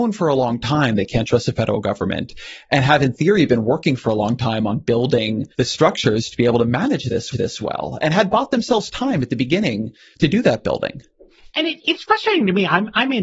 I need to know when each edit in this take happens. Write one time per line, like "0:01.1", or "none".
0:05.5
0:07.3